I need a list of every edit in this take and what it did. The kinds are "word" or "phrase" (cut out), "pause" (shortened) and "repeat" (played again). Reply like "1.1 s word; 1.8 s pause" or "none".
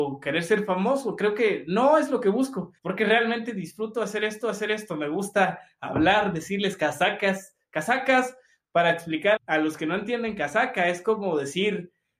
2.8 s pause; 4.4 s repeat; 9.4 s word